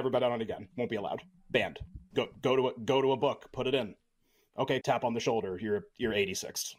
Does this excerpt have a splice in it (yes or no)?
yes